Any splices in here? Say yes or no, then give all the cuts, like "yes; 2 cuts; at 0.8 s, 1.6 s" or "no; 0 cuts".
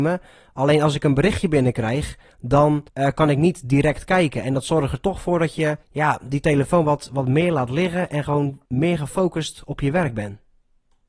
yes; 3 cuts; at 2.9 s, 5.8 s, 8.6 s